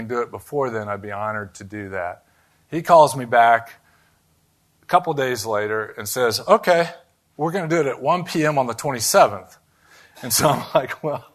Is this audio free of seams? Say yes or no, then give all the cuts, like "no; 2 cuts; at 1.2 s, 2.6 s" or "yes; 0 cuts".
yes; 0 cuts